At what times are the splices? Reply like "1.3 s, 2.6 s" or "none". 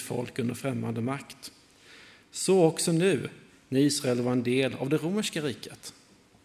none